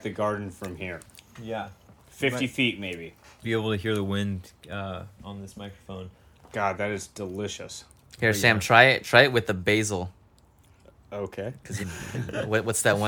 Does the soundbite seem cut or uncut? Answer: cut